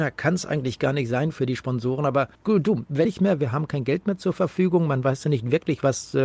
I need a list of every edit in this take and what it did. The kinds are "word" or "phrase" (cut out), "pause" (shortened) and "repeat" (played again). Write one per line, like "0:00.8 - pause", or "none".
0:02.3 - pause
0:03.0 - phrase